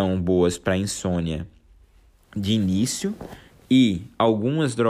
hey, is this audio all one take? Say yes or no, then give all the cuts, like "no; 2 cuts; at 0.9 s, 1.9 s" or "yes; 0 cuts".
yes; 0 cuts